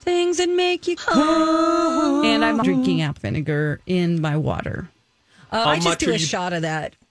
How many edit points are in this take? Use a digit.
4